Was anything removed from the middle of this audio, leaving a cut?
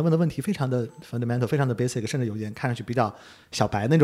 no; 0 cuts

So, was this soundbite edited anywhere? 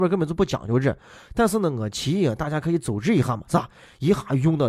no; 0 cuts

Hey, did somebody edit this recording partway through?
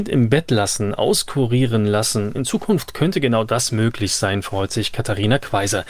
no; 0 cuts

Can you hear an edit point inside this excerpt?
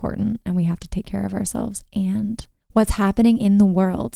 no; 0 cuts

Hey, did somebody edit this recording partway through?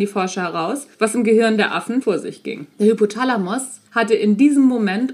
yes; 4 cuts; at 0.9 s, 2.0 s, 2.7 s, 3.9 s

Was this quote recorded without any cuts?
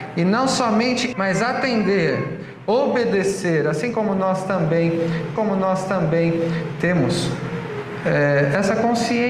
no; 2 cuts; at 1.1 s, 5.4 s

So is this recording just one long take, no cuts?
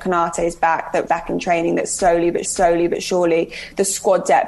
no; 2 cuts; at 1.1 s, 2.4 s

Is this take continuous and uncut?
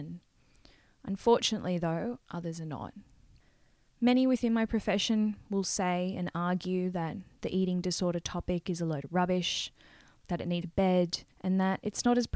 no; 2 cuts; at 10.6 s, 11.3 s

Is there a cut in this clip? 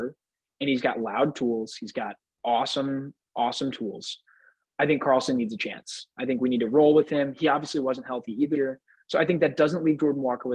yes; 1 cut; at 8.5 s

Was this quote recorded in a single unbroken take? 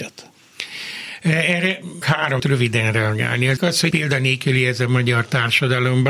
no; 4 cuts; at 2.0 s, 2.4 s, 3.6 s, 3.9 s

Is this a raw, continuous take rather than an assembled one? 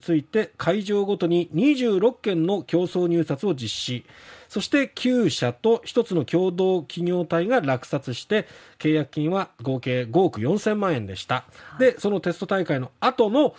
yes; 0 cuts

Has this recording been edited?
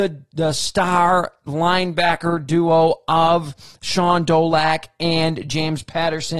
no; 0 cuts

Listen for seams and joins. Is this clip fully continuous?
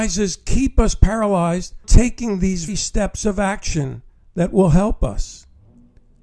no; 2 cuts; at 1.8 s, 2.7 s

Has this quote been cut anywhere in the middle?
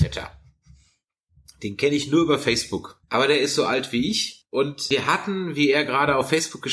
no; 0 cuts

